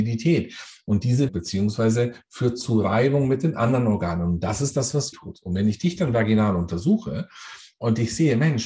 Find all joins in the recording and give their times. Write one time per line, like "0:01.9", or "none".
0:01.3
0:05.1